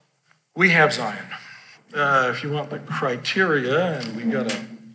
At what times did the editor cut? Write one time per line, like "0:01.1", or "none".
0:01.7